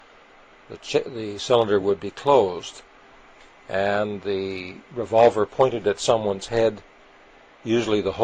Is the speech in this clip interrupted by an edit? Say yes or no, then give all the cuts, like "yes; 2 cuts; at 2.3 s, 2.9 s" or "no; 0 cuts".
no; 0 cuts